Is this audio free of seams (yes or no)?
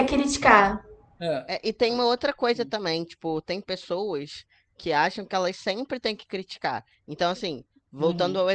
yes